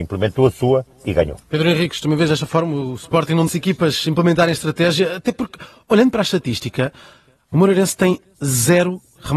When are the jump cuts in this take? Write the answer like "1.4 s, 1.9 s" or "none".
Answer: 0.9 s, 1.4 s, 3.5 s